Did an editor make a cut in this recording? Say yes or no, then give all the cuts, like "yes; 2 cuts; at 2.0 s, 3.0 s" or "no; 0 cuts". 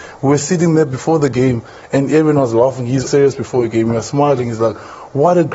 yes; 1 cut; at 3.1 s